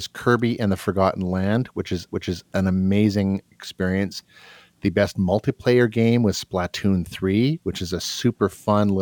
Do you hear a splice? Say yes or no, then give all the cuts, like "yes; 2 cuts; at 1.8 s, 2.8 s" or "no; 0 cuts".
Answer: yes; 2 cuts; at 2.1 s, 3.5 s